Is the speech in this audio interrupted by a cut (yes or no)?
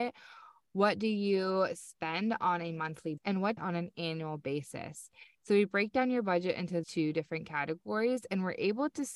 yes